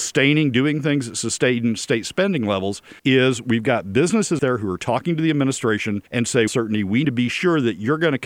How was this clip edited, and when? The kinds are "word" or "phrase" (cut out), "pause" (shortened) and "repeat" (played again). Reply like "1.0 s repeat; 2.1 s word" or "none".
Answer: 3.0 s pause; 4.4 s word; 6.1 s pause; 6.5 s phrase; 7.0 s word